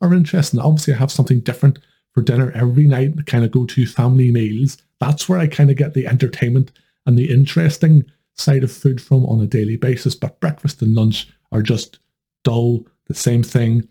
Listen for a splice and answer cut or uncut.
uncut